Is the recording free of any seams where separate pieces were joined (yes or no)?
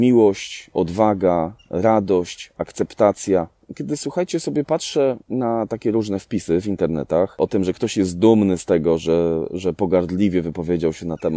no